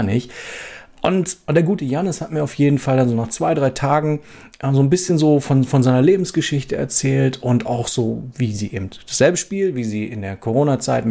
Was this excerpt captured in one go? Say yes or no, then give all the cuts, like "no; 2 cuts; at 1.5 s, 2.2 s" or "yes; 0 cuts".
yes; 0 cuts